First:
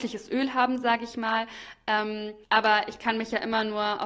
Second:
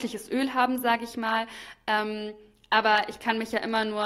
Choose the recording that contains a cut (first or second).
first